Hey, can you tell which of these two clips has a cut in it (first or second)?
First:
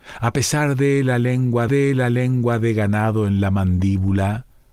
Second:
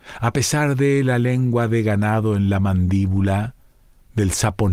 first